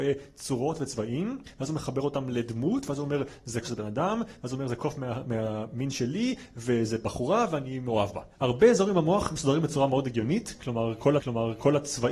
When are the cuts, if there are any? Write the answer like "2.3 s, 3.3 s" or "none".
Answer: 3.6 s, 11.2 s